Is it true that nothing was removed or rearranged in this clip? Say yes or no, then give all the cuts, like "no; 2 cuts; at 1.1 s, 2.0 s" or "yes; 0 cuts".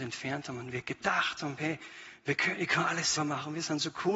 no; 1 cut; at 3.2 s